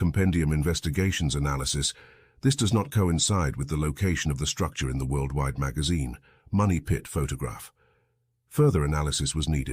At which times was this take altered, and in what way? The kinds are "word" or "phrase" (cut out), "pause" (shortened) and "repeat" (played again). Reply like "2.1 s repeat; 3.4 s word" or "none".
none